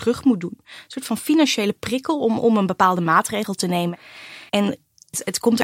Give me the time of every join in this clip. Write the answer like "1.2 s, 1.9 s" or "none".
4.5 s

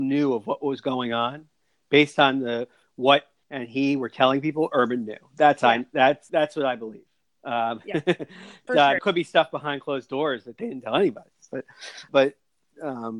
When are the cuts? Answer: 3.4 s, 6.3 s, 8.7 s, 9.0 s, 12.1 s

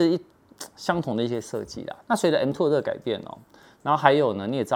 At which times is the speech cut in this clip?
2.0 s

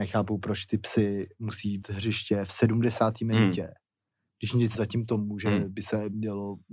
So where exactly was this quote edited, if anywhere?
1.8 s, 4.7 s

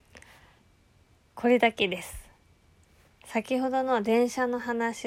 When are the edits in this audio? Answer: none

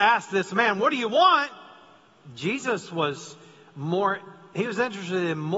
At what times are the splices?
none

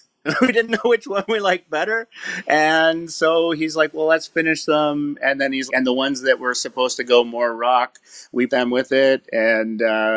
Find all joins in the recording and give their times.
5.7 s, 8.5 s

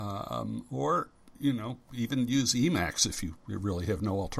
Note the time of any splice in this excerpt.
1.3 s

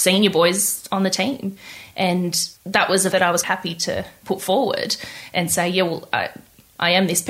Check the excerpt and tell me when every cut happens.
2.6 s, 3.1 s, 3.4 s, 4.2 s

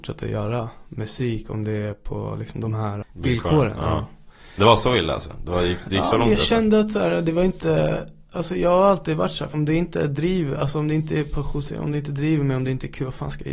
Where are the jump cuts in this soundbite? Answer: 3.0 s, 9.5 s

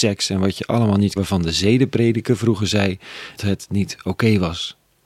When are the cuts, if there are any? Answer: 1.2 s, 3.4 s

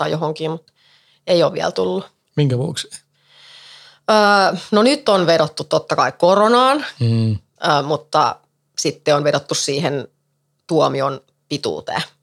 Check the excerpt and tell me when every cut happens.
none

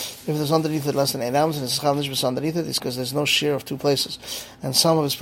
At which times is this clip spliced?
2.8 s

